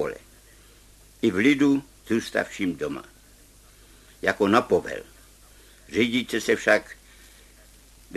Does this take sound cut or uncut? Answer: uncut